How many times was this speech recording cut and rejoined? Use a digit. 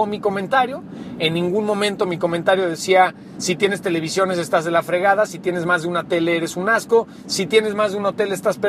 0